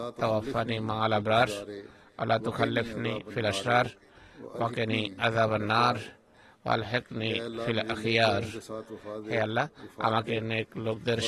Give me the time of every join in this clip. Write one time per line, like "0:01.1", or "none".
none